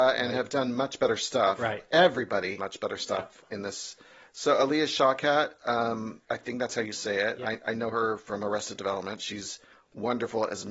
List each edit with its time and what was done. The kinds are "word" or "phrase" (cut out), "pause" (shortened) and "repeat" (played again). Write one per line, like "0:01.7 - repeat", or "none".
0:02.6 - phrase
0:06.2 - pause